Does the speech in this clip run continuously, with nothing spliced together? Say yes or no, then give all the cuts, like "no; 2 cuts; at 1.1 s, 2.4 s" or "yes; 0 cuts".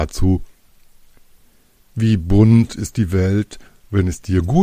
yes; 0 cuts